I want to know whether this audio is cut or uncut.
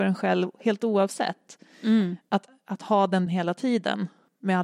cut